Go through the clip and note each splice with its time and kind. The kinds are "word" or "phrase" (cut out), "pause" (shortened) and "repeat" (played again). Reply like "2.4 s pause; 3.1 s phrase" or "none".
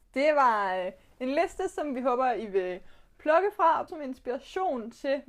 3.9 s word